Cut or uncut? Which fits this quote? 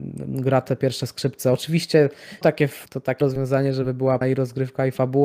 cut